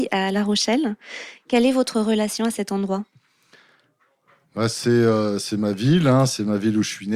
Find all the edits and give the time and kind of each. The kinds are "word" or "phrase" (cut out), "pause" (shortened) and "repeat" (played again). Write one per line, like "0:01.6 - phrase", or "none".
none